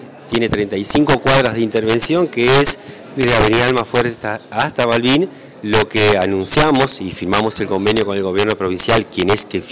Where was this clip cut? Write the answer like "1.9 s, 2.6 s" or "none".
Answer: 5.5 s